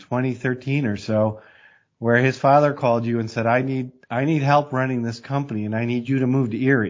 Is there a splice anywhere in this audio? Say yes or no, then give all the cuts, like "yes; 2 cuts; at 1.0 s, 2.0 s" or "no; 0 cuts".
no; 0 cuts